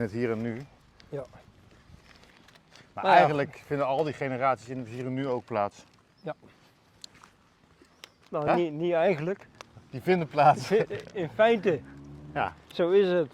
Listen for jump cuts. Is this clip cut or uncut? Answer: uncut